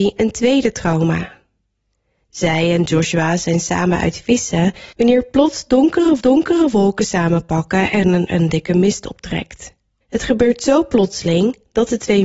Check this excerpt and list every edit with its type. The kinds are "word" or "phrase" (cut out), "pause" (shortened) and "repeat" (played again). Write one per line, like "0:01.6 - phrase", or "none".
0:04.9 - pause
0:06.2 - repeat
0:08.3 - word
0:10.0 - pause